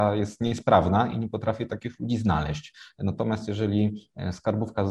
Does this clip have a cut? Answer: no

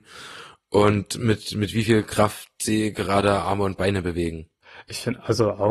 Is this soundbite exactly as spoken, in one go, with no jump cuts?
yes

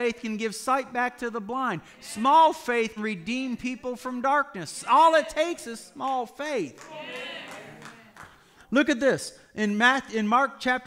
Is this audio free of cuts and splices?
no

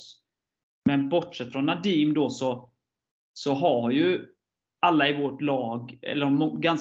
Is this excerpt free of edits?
yes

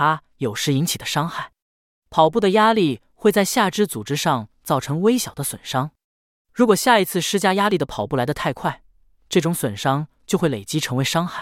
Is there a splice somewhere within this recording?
no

